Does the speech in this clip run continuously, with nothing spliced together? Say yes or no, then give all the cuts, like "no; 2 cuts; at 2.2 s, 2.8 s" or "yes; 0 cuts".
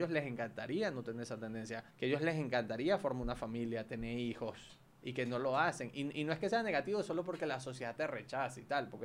no; 2 cuts; at 1.9 s, 4.9 s